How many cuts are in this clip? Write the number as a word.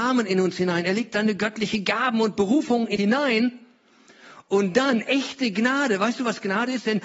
one